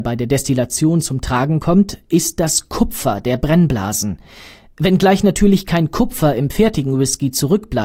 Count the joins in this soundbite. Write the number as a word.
zero